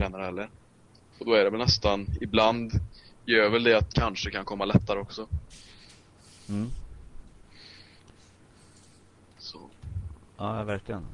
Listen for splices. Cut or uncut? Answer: cut